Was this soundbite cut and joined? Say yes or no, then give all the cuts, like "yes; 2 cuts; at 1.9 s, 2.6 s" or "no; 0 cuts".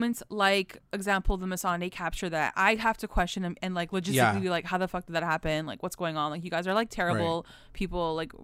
no; 0 cuts